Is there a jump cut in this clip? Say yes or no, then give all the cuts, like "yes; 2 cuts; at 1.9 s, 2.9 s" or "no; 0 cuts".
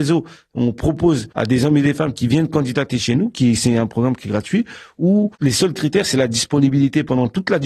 yes; 2 cuts; at 1.3 s, 5.3 s